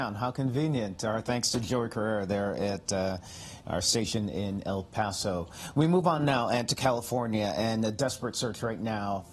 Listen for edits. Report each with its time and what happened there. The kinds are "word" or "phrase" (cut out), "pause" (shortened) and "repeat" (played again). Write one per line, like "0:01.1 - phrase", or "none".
none

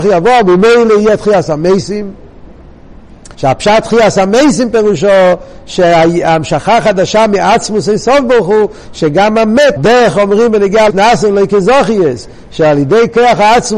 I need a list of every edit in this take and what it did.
0:03.3 - pause
0:09.8 - phrase
0:10.9 - phrase

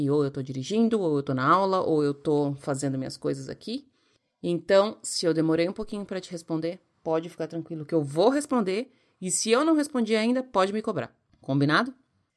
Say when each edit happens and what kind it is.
none

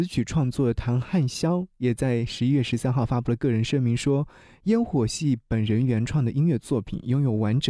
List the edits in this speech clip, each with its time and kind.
none

